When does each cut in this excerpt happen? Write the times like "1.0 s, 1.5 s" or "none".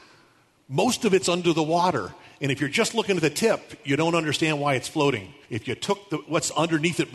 5.4 s